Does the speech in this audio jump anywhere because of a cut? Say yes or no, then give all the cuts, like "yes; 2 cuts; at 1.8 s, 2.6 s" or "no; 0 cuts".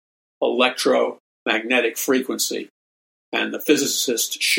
no; 0 cuts